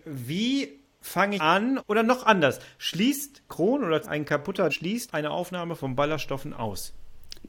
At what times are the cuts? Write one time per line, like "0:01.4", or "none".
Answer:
0:01.4
0:01.8
0:03.5
0:04.0
0:04.7
0:05.1